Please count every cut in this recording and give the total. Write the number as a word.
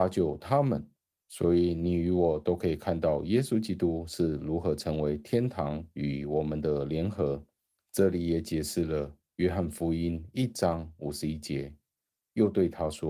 one